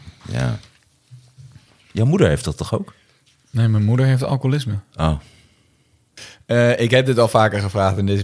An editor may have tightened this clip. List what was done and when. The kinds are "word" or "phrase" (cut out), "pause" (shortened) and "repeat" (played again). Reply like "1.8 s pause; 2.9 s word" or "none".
none